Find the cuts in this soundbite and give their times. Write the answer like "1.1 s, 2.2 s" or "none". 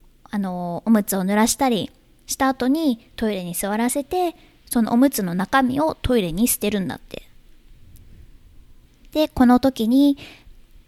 none